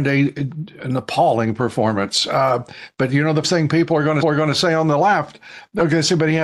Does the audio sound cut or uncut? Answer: cut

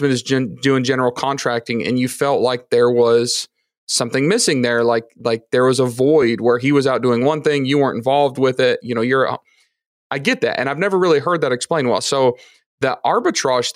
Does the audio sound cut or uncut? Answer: uncut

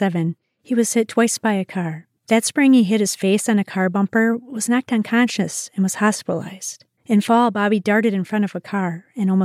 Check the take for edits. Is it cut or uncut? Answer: cut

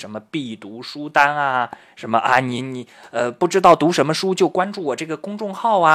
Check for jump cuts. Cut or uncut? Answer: uncut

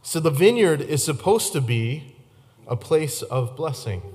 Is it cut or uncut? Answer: uncut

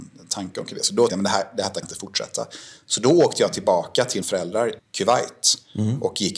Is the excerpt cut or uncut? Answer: cut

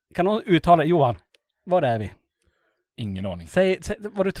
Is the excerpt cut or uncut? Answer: uncut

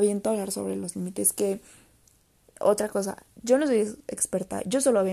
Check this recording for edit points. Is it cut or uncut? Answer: uncut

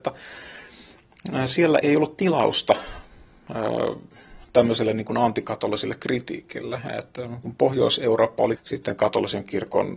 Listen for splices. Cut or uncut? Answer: cut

